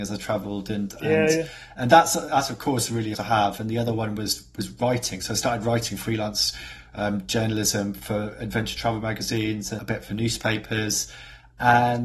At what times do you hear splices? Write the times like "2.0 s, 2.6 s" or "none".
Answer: 3.1 s, 9.8 s